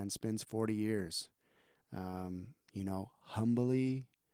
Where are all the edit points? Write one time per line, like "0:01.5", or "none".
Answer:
none